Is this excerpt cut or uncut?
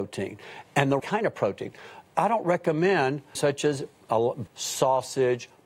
cut